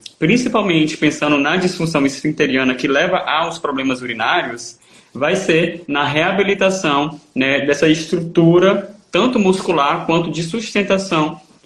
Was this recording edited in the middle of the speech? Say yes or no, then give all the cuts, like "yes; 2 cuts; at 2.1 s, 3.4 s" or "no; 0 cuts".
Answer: no; 0 cuts